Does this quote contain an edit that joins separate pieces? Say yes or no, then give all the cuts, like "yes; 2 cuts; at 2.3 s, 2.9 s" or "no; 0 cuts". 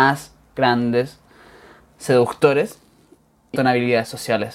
yes; 1 cut; at 3.5 s